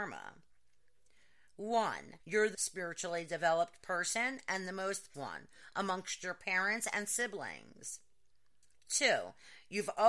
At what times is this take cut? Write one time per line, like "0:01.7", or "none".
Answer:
0:02.2
0:02.5
0:05.1